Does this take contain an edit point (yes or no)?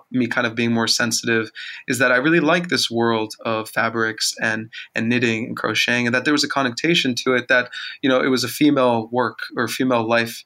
no